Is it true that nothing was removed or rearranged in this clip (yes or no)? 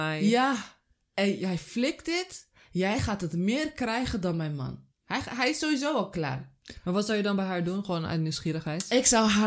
no